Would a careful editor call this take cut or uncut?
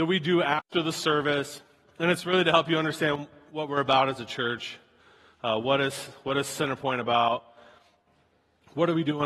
uncut